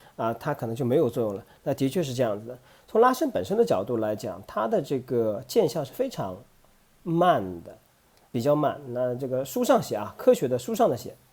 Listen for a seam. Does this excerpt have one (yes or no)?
yes